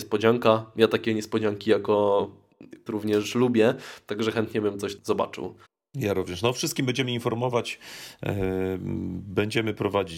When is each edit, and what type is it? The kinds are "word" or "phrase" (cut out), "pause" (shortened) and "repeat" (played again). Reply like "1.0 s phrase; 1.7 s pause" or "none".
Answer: 2.9 s word; 5.0 s word; 5.6 s pause